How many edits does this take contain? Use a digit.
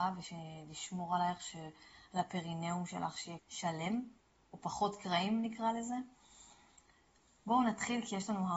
2